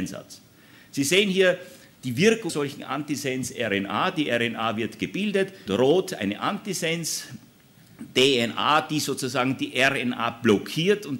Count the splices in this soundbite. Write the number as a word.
two